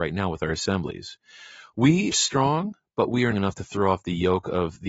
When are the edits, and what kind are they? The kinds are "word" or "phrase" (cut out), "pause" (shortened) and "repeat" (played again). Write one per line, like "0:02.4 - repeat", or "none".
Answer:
0:02.1 - word
0:03.3 - phrase